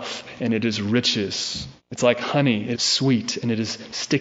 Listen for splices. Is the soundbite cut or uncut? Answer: cut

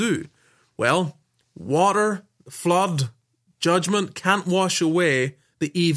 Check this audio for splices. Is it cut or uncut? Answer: uncut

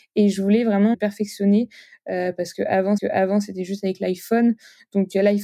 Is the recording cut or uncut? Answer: cut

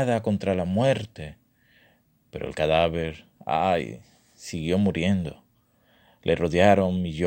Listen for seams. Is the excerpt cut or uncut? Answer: uncut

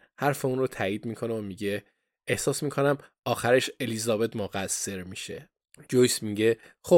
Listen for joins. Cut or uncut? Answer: uncut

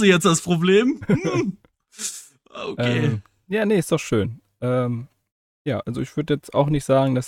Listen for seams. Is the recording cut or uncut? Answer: uncut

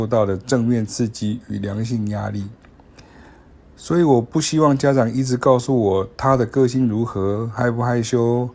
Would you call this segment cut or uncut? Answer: uncut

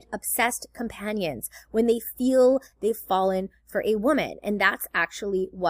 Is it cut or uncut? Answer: uncut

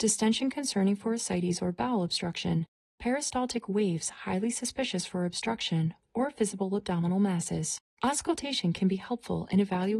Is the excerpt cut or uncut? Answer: cut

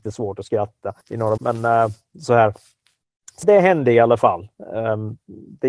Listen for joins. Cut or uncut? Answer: cut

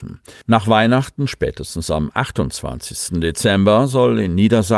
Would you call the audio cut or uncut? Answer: uncut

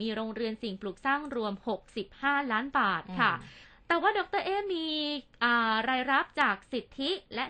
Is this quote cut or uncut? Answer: cut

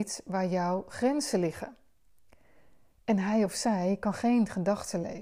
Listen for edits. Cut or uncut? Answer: uncut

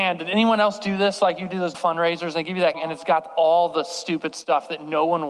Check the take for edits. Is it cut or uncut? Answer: cut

